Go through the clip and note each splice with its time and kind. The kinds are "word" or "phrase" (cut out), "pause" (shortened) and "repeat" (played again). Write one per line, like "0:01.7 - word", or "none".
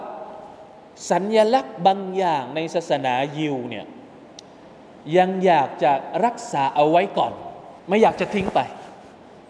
0:07.8 - pause